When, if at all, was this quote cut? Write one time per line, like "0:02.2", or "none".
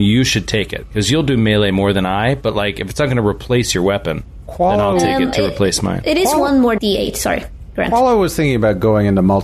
0:06.8